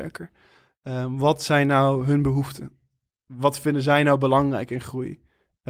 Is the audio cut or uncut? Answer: uncut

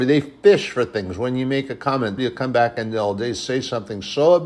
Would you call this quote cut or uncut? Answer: cut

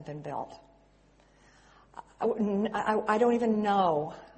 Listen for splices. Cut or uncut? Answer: uncut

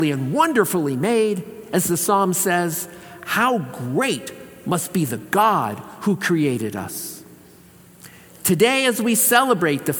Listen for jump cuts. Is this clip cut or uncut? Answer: uncut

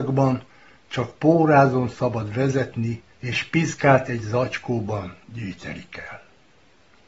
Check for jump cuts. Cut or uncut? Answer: cut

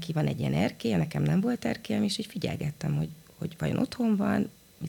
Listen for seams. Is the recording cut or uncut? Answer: uncut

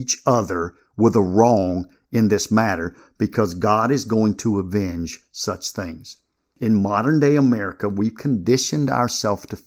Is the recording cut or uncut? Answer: uncut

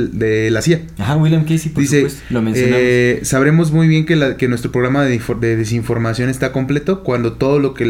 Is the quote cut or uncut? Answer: uncut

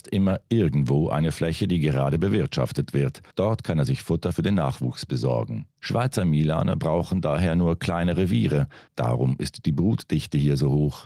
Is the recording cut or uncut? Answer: cut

